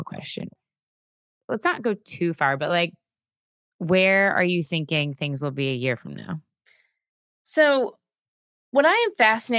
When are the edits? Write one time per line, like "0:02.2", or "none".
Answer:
none